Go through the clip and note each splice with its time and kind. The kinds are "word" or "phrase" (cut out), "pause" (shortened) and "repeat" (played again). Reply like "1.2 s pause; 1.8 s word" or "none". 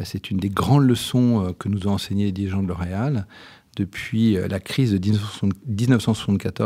none